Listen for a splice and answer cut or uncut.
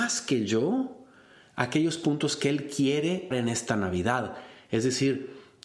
cut